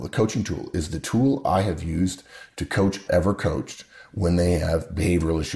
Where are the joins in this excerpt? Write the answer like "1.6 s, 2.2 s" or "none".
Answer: 3.1 s